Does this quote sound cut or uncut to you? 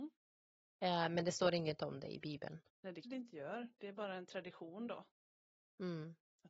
cut